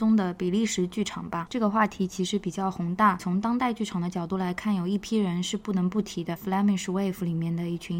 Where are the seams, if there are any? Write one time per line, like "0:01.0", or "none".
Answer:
0:06.4